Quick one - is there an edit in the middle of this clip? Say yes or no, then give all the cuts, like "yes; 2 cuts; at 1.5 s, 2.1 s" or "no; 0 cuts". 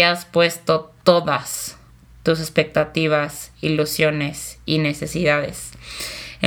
no; 0 cuts